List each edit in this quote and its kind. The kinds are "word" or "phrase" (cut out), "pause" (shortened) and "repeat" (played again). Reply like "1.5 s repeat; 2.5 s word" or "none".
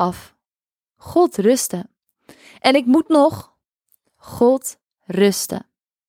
none